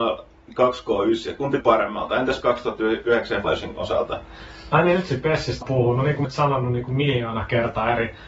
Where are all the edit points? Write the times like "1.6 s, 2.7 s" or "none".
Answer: 1.6 s, 2.4 s, 3.4 s, 5.6 s, 6.2 s